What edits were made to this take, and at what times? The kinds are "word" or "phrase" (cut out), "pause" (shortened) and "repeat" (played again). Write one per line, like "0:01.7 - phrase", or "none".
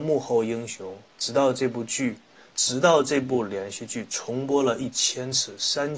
none

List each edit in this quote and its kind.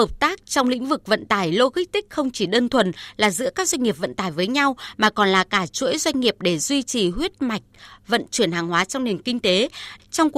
none

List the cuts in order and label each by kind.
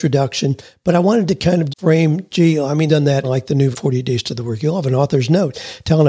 0:01.7 - word
0:02.9 - word
0:03.2 - word
0:03.7 - word

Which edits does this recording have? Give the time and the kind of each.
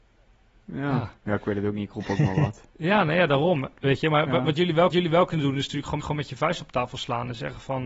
0:01.2 - pause
0:04.9 - repeat
0:06.0 - repeat

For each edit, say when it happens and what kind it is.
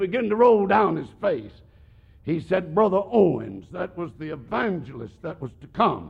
none

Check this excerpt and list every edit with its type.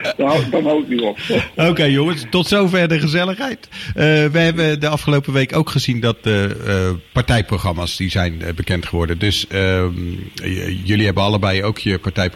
none

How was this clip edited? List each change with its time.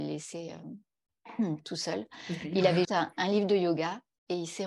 0:02.8 - word

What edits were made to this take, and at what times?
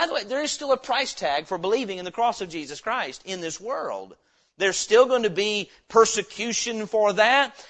none

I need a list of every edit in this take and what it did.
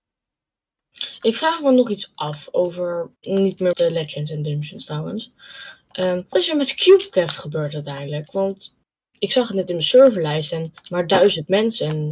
0:03.2 - pause
0:03.7 - word
0:06.3 - word
0:10.8 - pause

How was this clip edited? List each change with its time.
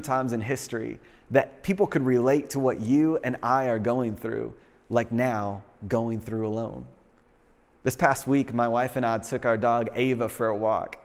none

